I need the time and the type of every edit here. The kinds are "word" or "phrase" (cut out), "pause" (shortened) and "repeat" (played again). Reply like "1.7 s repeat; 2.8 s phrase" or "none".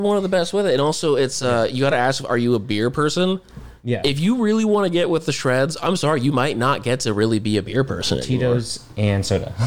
none

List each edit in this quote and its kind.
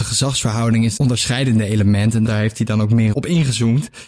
1.0 s phrase; 2.3 s word; 3.1 s word

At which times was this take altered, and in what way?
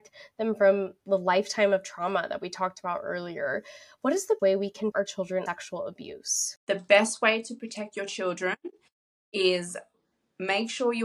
4.4 s word; 4.9 s word; 5.5 s word

